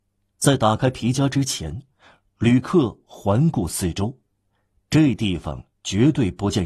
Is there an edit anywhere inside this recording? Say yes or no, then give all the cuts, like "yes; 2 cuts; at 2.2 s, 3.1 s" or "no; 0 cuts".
no; 0 cuts